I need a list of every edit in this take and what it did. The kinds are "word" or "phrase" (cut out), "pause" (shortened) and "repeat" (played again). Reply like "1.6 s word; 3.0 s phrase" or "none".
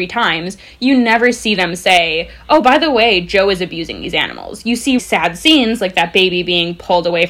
5.0 s word